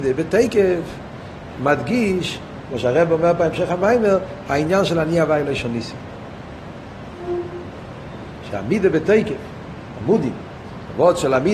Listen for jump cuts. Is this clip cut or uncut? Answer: uncut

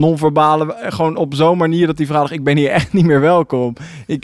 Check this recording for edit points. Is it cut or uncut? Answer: uncut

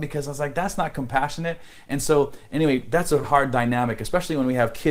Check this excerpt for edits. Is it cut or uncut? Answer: cut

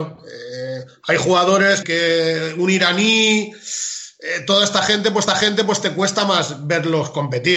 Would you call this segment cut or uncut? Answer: cut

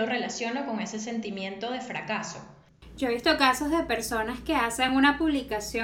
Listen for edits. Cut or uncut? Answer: uncut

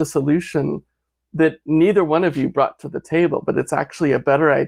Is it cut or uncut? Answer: uncut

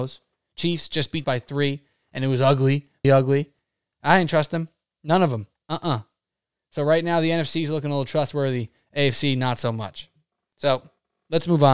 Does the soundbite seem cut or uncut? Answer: cut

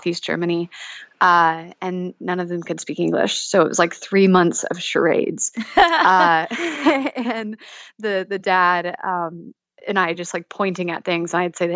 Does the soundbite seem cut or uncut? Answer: uncut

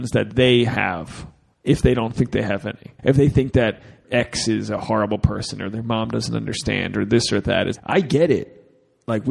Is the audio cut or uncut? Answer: cut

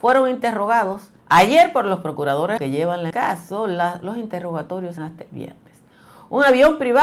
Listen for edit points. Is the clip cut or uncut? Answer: cut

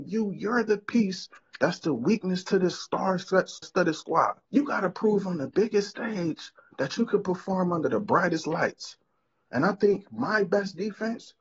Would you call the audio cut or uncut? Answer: cut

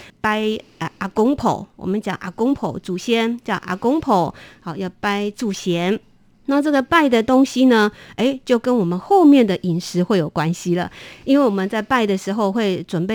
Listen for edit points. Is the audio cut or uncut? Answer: uncut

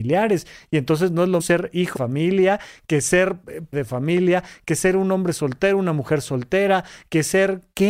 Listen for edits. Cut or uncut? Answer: cut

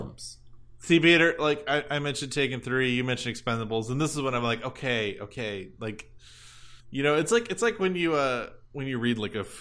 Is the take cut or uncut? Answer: cut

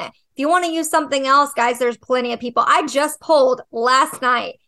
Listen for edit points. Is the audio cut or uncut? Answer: uncut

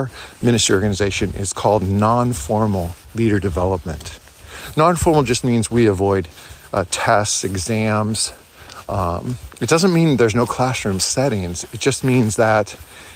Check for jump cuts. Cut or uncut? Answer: uncut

